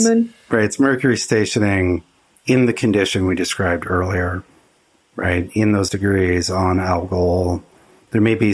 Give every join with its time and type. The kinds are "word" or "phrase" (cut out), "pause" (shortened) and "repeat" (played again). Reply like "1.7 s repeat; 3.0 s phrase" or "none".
5.9 s word